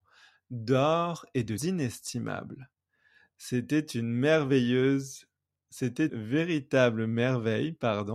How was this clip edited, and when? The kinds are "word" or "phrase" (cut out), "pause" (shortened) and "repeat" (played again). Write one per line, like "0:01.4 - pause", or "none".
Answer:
0:01.6 - word
0:06.1 - word